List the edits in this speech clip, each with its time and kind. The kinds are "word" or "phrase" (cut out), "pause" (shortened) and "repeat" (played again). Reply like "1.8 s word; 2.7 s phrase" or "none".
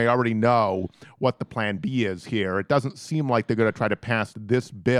none